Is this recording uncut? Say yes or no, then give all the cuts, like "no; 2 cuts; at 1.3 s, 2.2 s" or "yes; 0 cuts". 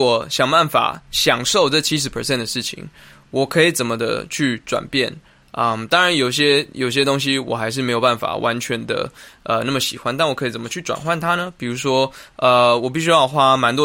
yes; 0 cuts